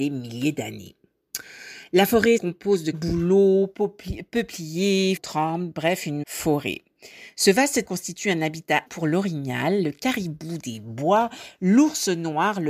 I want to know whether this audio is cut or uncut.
cut